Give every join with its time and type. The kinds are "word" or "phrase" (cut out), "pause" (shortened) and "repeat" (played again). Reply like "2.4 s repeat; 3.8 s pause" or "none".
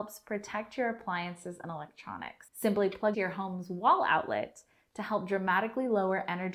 3.1 s phrase